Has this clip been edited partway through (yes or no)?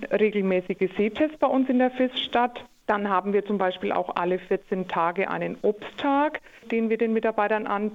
no